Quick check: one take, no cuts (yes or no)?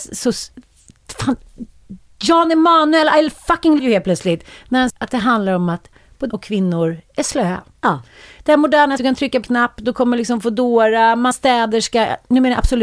no